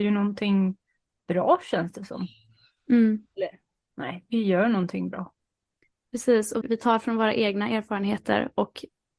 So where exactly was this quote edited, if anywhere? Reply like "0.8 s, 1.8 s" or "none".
6.6 s